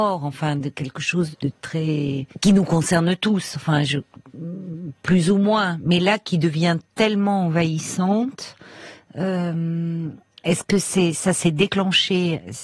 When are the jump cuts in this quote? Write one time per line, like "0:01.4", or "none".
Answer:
0:01.3
0:02.3

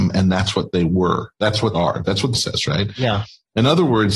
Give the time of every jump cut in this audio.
0:01.7
0:02.3

